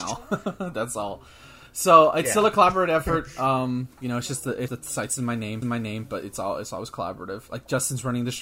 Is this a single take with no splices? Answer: no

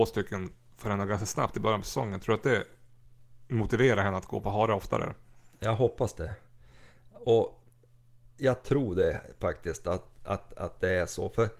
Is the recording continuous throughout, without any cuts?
yes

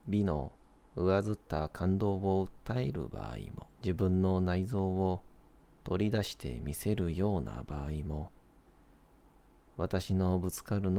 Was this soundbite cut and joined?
yes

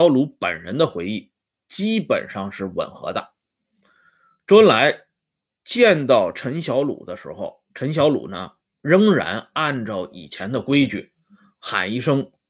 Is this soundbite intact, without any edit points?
yes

